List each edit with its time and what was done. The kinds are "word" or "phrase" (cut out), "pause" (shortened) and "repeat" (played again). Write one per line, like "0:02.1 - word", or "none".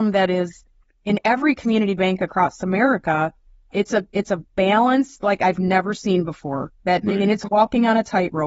none